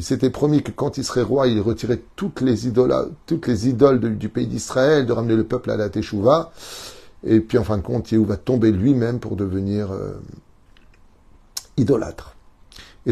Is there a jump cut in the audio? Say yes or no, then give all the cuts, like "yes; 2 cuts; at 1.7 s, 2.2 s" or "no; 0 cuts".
no; 0 cuts